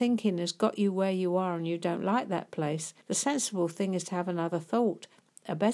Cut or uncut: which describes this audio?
cut